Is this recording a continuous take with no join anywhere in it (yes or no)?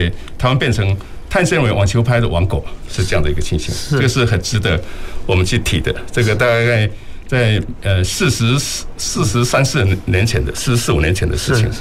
yes